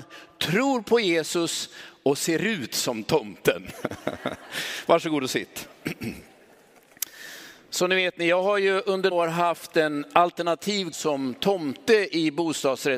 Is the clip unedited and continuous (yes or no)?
no